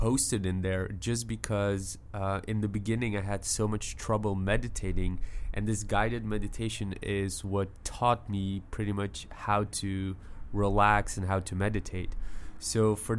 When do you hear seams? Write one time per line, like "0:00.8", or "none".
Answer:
none